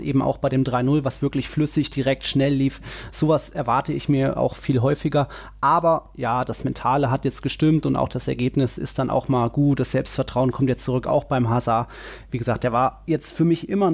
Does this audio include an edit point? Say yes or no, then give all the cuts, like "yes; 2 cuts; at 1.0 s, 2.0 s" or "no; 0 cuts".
no; 0 cuts